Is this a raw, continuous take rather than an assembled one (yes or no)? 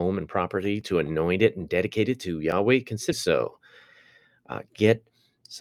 no